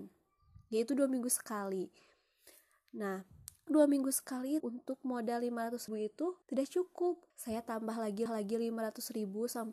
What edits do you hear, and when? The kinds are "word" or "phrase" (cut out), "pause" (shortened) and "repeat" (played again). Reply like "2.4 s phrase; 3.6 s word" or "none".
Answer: 3.7 s word; 4.6 s word; 5.9 s word; 6.4 s pause; 7.3 s pause; 8.3 s repeat